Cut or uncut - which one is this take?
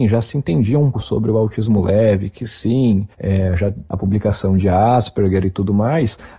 cut